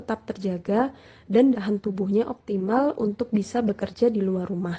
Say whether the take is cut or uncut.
cut